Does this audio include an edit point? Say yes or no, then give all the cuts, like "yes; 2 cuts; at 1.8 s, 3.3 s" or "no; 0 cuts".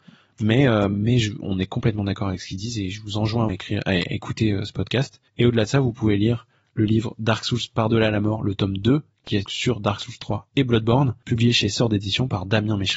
yes; 3 cuts; at 3.5 s, 5.3 s, 9.4 s